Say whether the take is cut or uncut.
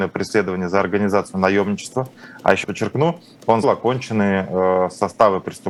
cut